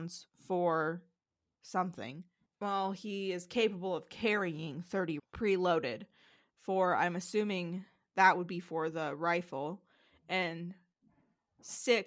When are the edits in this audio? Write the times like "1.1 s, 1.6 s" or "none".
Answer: 5.2 s